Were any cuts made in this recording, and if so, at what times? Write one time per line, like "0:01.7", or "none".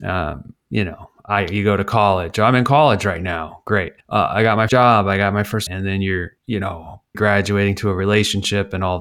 0:04.0
0:04.7
0:05.7
0:06.4
0:07.1